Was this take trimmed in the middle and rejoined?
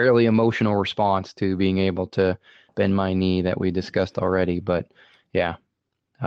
no; 0 cuts

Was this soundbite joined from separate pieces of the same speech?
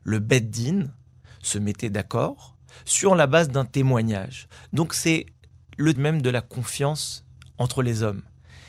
yes; 1 cut; at 6.0 s

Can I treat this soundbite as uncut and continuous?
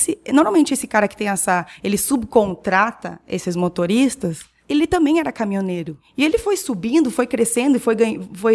yes; 0 cuts

